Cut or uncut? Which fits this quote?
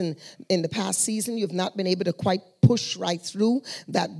uncut